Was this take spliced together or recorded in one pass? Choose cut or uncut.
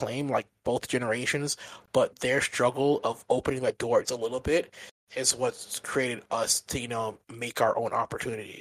cut